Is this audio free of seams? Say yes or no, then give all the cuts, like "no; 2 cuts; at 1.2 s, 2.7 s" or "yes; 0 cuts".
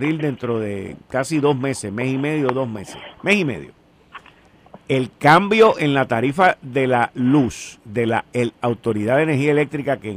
no; 1 cut; at 3.1 s